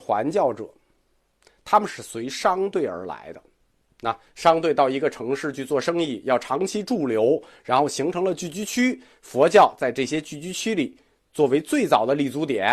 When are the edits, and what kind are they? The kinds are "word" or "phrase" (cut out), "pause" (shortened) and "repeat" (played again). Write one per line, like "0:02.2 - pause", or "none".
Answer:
none